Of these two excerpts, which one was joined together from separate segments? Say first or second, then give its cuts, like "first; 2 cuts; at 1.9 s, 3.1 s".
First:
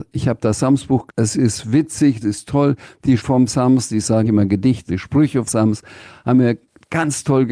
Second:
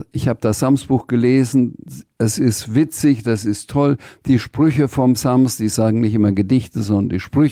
first; 6 cuts; at 1.1 s, 2.2 s, 3.2 s, 4.2 s, 4.9 s, 5.5 s